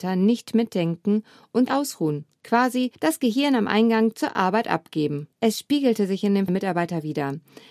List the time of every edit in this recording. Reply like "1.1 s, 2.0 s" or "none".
1.7 s, 2.9 s, 5.3 s, 6.5 s